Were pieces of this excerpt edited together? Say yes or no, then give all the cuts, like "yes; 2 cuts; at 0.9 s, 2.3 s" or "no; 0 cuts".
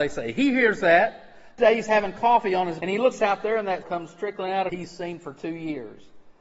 yes; 4 cuts; at 1.6 s, 2.8 s, 3.8 s, 4.7 s